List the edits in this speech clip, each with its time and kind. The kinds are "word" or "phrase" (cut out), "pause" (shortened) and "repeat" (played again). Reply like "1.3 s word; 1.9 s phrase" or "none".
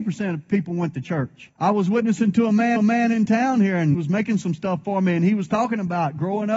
1.6 s pause; 2.8 s repeat; 3.9 s word